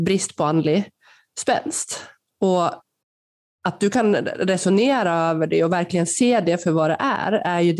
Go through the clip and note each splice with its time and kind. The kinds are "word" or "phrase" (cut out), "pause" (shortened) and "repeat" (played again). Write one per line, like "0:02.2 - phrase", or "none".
none